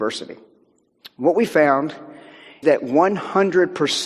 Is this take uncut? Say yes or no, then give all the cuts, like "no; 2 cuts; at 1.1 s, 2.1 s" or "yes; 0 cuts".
no; 1 cut; at 2.6 s